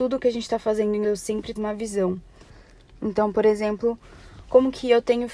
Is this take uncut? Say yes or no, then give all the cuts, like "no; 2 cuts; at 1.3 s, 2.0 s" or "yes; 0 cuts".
no; 2 cuts; at 1.0 s, 1.6 s